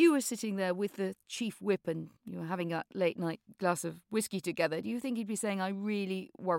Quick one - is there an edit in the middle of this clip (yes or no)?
yes